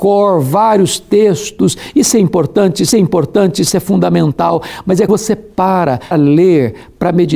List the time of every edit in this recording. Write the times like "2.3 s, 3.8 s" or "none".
2.9 s, 5.1 s, 6.1 s